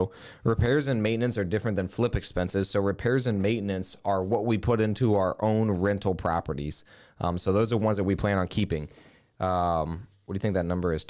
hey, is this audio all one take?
yes; 0 cuts

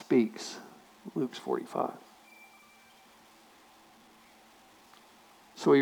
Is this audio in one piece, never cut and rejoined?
no; 1 cut; at 1.3 s

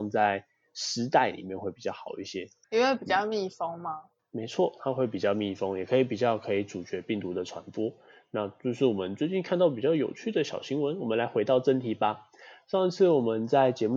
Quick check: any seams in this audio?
no; 0 cuts

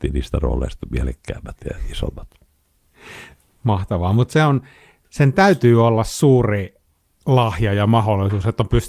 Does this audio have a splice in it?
no; 0 cuts

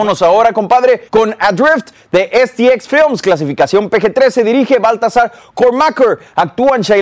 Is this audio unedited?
no; 1 cut; at 1.1 s

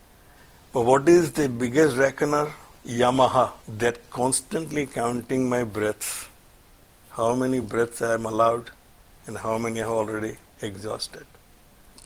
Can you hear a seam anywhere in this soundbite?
no; 0 cuts

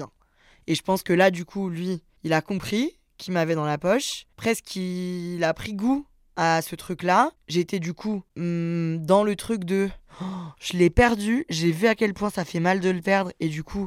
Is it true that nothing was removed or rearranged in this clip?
no; 2 cuts; at 2.2 s, 4.3 s

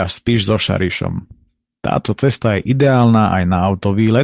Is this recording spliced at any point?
no; 0 cuts

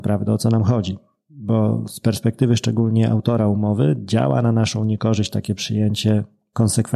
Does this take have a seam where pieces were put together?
no; 0 cuts

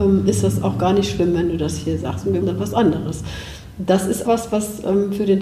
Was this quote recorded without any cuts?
no; 2 cuts; at 2.4 s, 4.2 s

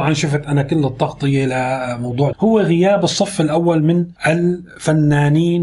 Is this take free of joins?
no; 2 cuts; at 2.3 s, 4.2 s

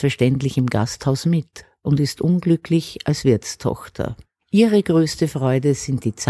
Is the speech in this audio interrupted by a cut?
no; 0 cuts

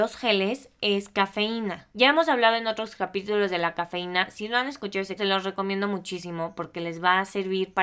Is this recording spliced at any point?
yes; 2 cuts; at 1.9 s, 5.2 s

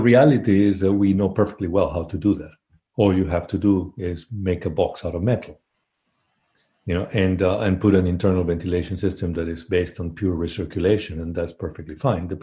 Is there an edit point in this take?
no; 0 cuts

